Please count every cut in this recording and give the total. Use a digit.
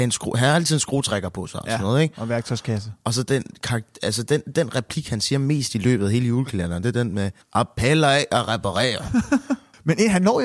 1